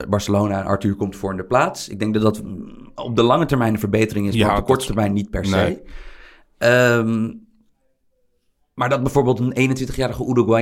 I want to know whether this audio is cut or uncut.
uncut